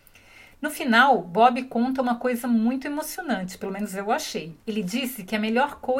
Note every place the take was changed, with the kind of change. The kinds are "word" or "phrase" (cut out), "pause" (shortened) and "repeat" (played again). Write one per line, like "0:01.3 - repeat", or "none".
0:04.6 - pause